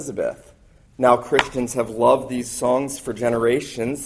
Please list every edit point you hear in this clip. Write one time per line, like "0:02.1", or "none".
none